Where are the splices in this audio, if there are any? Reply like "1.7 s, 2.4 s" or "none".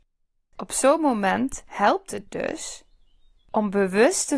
none